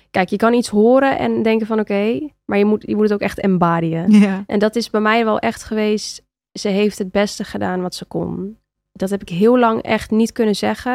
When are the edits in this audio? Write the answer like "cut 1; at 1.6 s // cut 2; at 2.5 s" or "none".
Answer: none